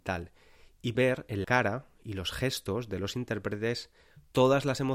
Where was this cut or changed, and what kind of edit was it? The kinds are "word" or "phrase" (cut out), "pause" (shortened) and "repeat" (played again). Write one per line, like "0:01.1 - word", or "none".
0:00.9 - word
0:01.4 - word